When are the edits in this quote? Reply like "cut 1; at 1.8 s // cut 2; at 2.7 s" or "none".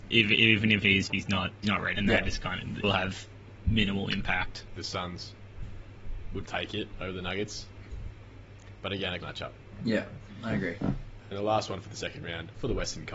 cut 1; at 1.1 s // cut 2; at 1.6 s // cut 3; at 1.9 s // cut 4; at 2.8 s // cut 5; at 4.8 s // cut 6; at 6.5 s // cut 7; at 9.2 s // cut 8; at 11.3 s